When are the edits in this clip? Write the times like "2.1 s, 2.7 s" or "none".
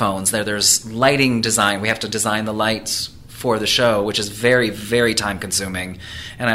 none

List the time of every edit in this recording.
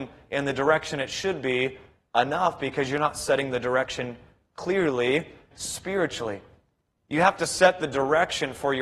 5.5 s

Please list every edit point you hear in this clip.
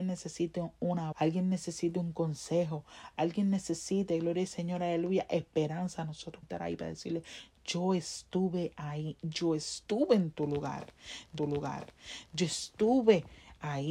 1.1 s, 6.4 s, 11.4 s

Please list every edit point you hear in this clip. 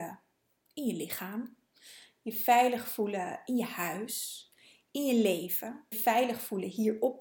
5.9 s

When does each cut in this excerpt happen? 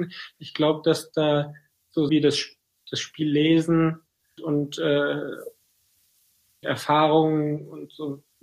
2.1 s, 4.4 s, 6.6 s

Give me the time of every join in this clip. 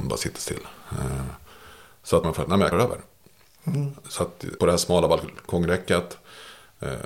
2.2 s, 2.7 s, 4.6 s

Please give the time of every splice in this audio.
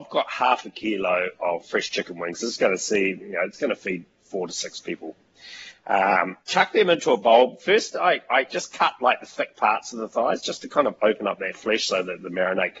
6.4 s

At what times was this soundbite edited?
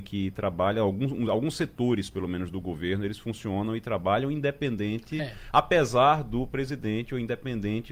none

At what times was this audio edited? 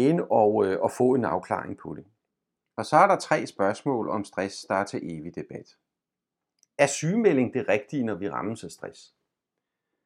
none

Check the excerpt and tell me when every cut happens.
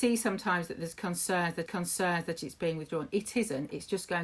1.7 s

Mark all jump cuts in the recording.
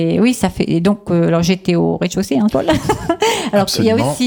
2.5 s

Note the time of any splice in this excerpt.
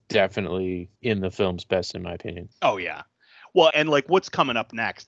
0.9 s, 1.9 s, 2.5 s, 3.7 s

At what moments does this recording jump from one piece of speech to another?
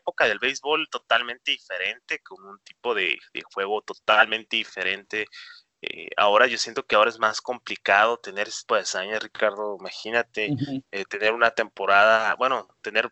8.7 s

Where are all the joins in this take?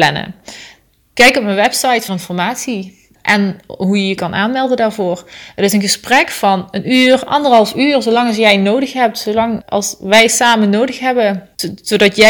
2.1 s, 3.2 s, 9.6 s

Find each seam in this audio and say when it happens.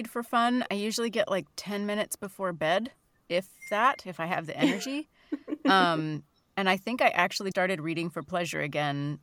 7.5 s

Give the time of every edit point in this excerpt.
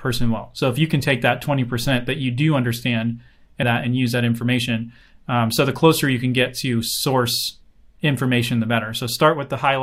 3.6 s

